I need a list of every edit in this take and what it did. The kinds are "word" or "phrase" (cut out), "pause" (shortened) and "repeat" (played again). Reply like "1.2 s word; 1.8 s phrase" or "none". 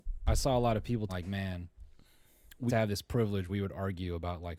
1.1 s word; 2.7 s word; 3.5 s word